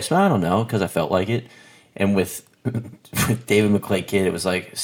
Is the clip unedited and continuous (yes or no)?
yes